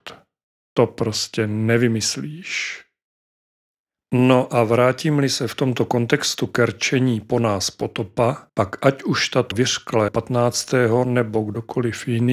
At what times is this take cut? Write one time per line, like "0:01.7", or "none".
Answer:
0:08.5
0:09.5
0:10.1